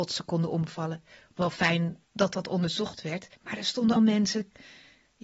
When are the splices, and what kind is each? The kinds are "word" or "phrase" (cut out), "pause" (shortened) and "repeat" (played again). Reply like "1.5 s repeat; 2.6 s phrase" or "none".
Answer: 1.4 s word; 2.0 s pause; 3.4 s pause; 4.0 s word